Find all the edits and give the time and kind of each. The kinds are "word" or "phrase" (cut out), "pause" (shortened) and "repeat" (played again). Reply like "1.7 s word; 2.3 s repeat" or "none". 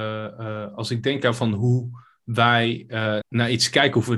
3.2 s word